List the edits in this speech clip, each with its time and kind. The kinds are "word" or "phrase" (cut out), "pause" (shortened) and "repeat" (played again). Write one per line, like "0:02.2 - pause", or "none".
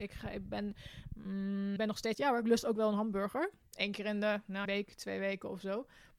0:01.8 - word
0:02.1 - phrase
0:04.7 - word